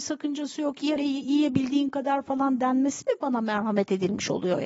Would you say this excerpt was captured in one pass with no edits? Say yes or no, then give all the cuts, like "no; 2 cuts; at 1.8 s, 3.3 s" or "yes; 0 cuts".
no; 1 cut; at 1.0 s